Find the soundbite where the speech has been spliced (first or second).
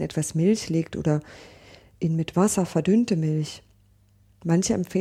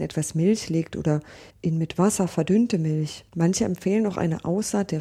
second